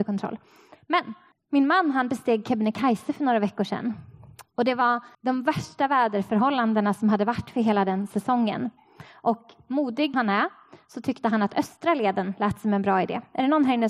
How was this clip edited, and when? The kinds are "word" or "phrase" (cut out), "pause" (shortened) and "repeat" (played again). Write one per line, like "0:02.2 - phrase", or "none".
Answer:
0:01.3 - pause
0:05.1 - pause
0:10.1 - word